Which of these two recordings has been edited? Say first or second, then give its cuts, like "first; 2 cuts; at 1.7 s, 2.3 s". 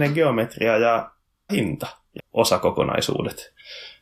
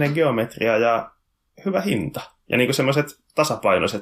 first; 2 cuts; at 1.5 s, 2.2 s